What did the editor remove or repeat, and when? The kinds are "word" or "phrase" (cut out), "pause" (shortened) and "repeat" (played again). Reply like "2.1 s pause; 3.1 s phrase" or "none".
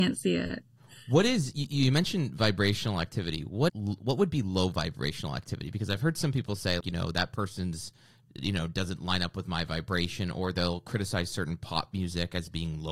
3.7 s word; 6.8 s word